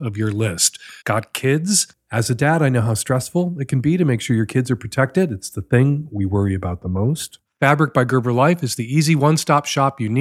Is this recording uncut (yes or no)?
no